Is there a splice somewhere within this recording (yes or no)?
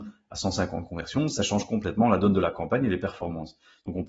no